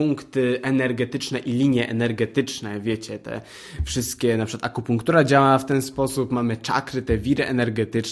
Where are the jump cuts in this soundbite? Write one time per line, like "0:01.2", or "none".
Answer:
none